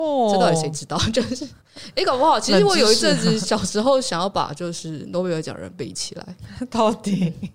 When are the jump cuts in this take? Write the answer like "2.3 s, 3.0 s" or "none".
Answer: 1.6 s